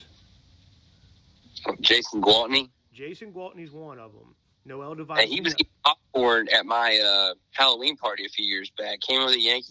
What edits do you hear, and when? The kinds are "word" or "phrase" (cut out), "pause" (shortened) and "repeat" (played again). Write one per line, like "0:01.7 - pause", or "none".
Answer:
0:07.4 - pause